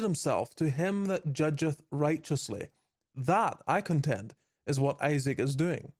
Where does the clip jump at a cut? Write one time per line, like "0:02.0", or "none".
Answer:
none

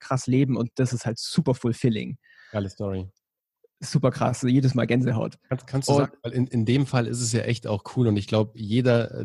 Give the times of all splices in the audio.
none

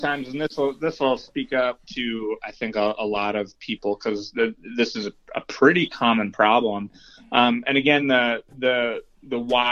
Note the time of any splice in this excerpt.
none

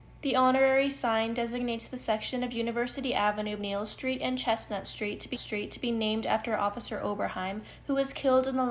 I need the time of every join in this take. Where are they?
0:03.6
0:05.3

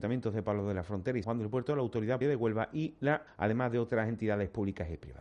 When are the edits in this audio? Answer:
0:01.2
0:02.2
0:03.3

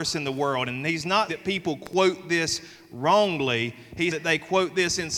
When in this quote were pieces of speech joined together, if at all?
0:01.3
0:04.1

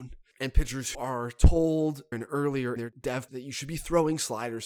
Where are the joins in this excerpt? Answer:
0:00.9
0:02.1
0:02.8
0:03.3

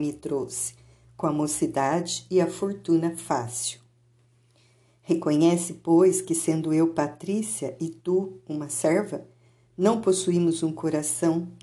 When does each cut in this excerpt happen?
none

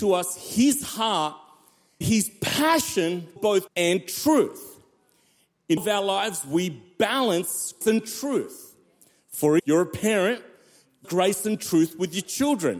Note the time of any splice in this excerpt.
0:02.0
0:03.4
0:03.7
0:05.8
0:07.8
0:09.6
0:11.0

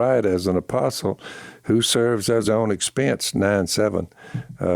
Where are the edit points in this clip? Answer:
0:02.4

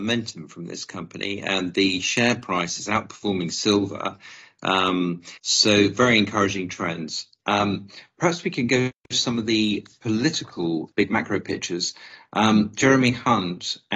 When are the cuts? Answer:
0:05.4
0:10.9

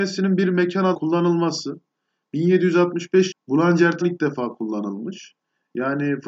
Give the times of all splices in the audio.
0:00.9
0:03.3
0:04.0

